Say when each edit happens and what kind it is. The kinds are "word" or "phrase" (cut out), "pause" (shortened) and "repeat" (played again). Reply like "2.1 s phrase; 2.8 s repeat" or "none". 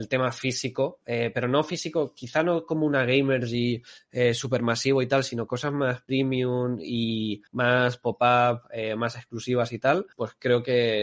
7.5 s pause; 10.1 s pause